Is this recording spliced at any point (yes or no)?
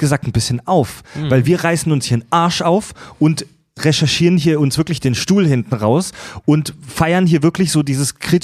no